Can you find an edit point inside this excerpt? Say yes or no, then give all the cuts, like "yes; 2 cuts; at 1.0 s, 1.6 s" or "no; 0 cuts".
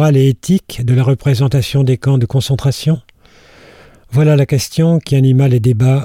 no; 0 cuts